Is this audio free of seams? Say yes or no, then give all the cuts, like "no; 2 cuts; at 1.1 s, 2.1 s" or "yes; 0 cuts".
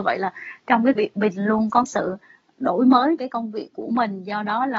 no; 3 cuts; at 0.9 s, 1.8 s, 3.2 s